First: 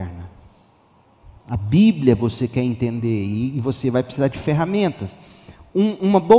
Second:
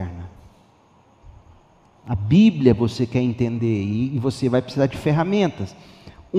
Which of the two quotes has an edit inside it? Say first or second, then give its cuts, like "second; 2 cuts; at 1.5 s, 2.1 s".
first; 1 cut; at 1.4 s